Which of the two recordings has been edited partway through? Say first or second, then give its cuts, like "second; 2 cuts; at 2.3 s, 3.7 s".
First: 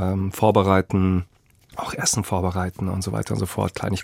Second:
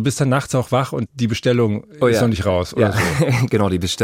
second; 1 cut; at 1.1 s